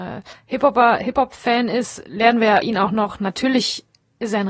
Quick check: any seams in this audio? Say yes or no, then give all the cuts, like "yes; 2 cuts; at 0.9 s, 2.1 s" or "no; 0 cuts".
yes; 1 cut; at 2.6 s